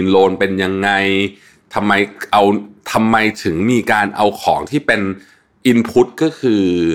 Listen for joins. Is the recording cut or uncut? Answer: uncut